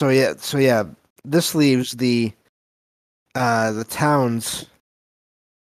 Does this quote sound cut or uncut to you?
uncut